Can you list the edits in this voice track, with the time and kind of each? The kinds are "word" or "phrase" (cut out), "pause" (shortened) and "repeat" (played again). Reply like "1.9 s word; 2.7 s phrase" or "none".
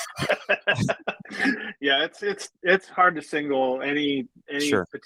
none